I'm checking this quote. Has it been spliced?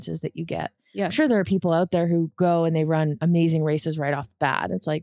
no; 0 cuts

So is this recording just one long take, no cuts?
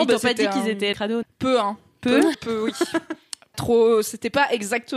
no; 4 cuts; at 0.9 s, 1.2 s, 2.3 s, 3.5 s

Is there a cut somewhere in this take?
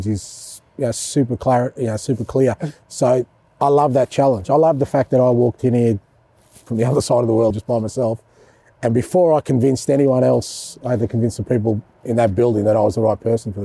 yes; 1 cut; at 7.5 s

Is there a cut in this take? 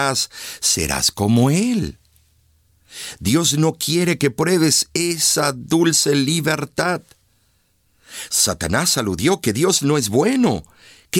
no; 0 cuts

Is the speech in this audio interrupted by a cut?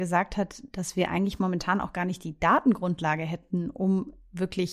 no; 0 cuts

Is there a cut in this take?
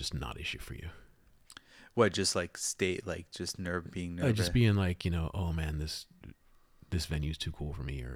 no; 0 cuts

